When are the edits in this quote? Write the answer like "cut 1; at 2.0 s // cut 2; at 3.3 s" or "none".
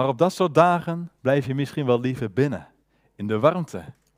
cut 1; at 1.2 s // cut 2; at 2.8 s